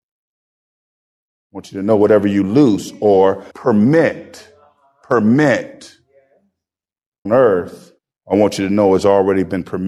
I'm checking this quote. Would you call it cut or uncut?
cut